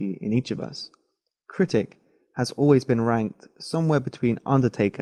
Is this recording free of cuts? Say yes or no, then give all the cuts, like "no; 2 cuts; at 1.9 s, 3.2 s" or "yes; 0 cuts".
yes; 0 cuts